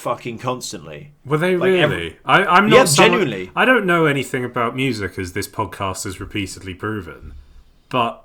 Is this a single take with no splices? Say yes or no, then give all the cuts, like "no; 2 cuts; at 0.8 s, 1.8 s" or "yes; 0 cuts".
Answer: yes; 0 cuts